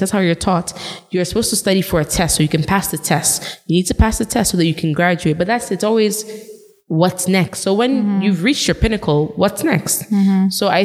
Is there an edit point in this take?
no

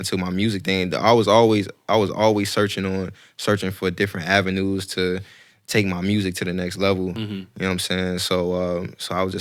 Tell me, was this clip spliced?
no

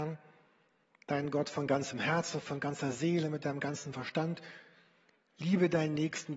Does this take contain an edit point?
no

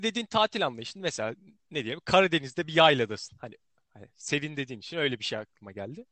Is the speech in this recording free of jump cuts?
yes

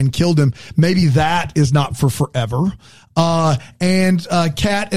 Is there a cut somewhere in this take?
no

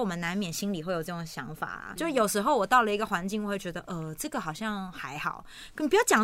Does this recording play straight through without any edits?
no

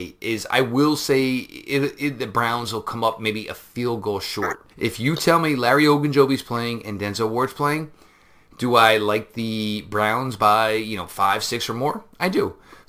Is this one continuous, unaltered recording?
no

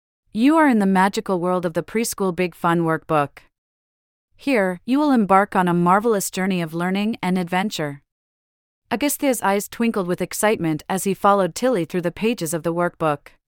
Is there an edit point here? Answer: no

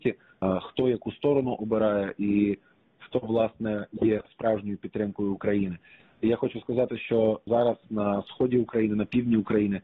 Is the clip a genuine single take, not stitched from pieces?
yes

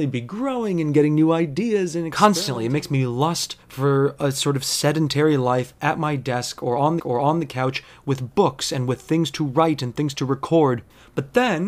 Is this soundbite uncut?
no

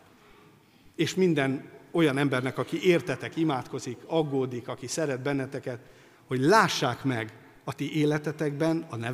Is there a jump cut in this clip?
no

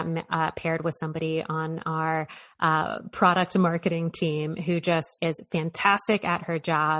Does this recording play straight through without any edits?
no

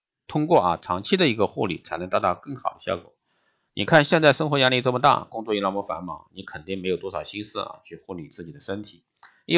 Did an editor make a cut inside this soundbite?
no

